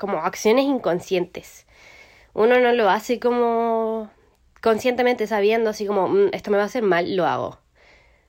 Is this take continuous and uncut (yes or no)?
yes